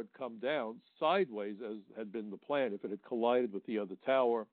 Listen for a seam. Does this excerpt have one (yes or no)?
no